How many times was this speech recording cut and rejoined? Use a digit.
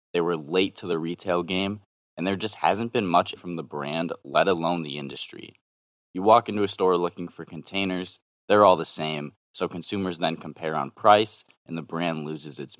1